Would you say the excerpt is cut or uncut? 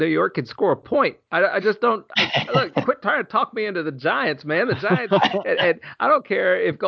uncut